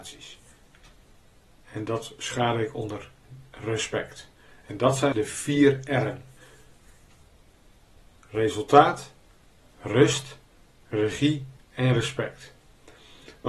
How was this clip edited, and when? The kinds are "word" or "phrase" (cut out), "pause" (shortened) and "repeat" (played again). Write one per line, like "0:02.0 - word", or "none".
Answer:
0:05.1 - word
0:11.6 - pause